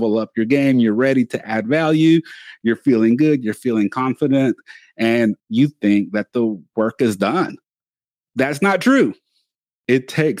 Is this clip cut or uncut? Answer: uncut